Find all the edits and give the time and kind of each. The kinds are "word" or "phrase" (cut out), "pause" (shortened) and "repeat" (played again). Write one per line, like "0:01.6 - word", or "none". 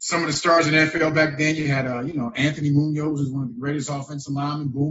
none